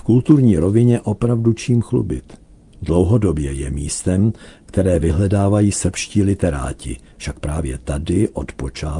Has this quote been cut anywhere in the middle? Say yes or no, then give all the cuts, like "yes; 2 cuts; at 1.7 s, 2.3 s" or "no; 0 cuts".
no; 0 cuts